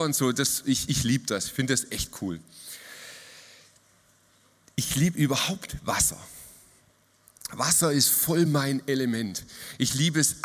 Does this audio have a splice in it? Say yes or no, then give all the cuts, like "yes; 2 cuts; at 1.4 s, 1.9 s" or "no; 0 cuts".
no; 0 cuts